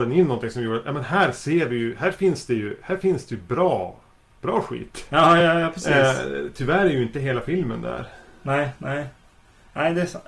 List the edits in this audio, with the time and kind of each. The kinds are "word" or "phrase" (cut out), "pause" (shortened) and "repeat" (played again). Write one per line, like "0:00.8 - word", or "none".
none